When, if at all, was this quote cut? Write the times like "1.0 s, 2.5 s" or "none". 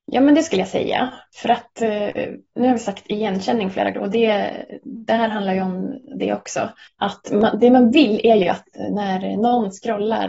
3.9 s, 6.9 s